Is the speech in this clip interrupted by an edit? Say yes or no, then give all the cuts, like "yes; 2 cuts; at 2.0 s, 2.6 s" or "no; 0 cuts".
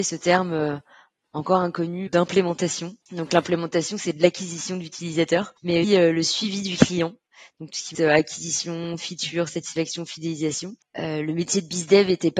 yes; 5 cuts; at 2.1 s, 3.0 s, 5.8 s, 7.9 s, 10.8 s